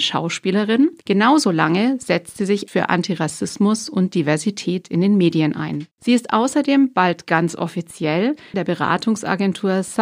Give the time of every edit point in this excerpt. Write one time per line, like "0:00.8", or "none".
0:01.0
0:02.7
0:05.9
0:08.5

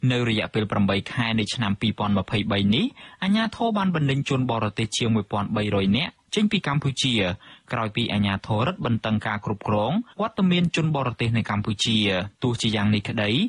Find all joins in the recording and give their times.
0:10.1
0:12.3

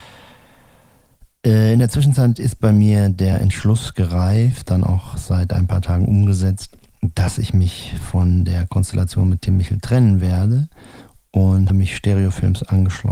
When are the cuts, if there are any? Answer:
0:04.6
0:11.7

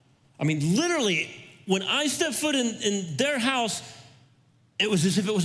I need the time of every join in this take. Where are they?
none

